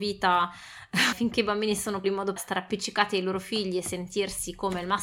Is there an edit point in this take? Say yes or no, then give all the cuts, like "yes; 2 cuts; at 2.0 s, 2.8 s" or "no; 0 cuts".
yes; 3 cuts; at 1.1 s, 2.0 s, 2.4 s